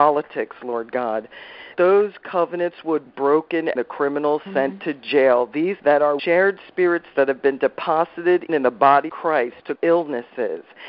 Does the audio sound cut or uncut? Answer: cut